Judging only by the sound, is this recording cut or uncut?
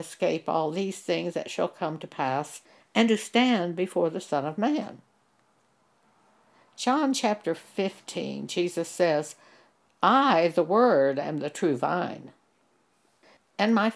uncut